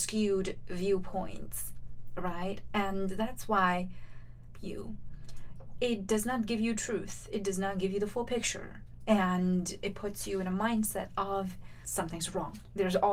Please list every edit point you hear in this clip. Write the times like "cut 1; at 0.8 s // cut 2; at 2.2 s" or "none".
cut 1; at 4.5 s

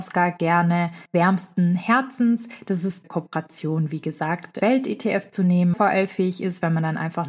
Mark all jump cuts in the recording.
cut 1; at 1.1 s // cut 2; at 3.0 s // cut 3; at 4.6 s // cut 4; at 5.7 s

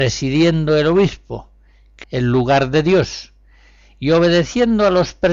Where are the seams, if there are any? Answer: cut 1; at 2.0 s

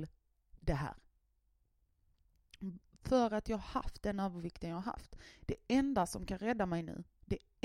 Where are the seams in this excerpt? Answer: none

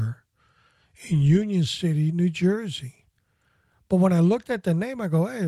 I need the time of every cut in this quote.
none

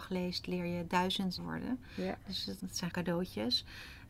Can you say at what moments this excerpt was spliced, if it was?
cut 1; at 1.4 s // cut 2; at 2.6 s // cut 3; at 2.9 s

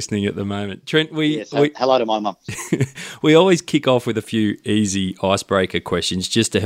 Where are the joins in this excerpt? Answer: none

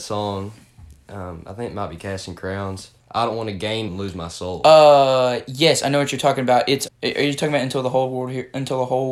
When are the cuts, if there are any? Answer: cut 1; at 3.0 s // cut 2; at 3.9 s // cut 3; at 6.9 s

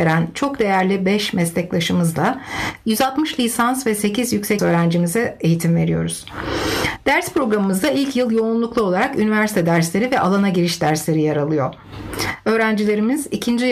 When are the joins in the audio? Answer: cut 1; at 4.6 s

